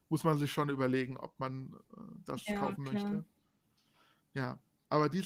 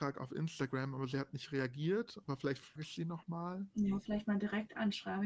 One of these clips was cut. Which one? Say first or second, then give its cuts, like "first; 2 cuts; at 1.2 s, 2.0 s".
second; 1 cut; at 2.8 s